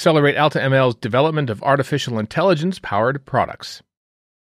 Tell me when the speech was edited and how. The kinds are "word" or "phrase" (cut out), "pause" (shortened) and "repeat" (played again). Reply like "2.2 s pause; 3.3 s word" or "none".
none